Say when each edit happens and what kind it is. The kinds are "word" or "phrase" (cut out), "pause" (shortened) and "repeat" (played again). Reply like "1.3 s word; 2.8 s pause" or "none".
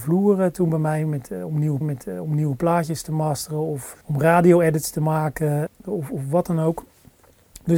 1.8 s repeat; 4.0 s pause; 5.7 s pause